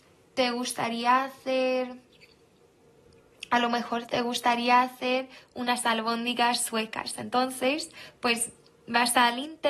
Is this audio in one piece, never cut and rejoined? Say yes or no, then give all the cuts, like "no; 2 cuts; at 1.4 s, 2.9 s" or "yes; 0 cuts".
yes; 0 cuts